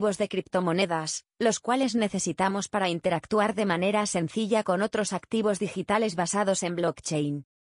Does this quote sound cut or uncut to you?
uncut